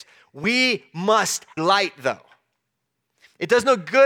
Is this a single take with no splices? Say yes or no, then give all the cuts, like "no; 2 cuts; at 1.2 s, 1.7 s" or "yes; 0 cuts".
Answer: no; 1 cut; at 1.6 s